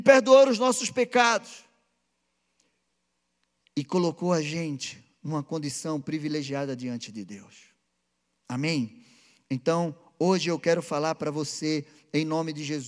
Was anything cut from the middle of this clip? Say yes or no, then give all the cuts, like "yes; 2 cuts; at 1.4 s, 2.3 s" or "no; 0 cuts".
no; 0 cuts